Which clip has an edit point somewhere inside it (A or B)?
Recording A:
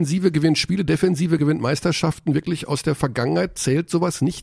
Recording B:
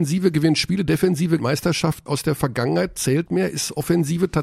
B